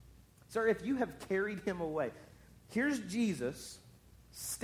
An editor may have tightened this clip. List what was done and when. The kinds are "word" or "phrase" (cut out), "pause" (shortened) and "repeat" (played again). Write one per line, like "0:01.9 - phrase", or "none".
none